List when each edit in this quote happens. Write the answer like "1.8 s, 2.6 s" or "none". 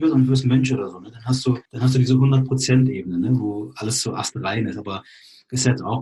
1.7 s